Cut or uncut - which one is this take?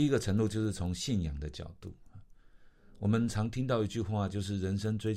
uncut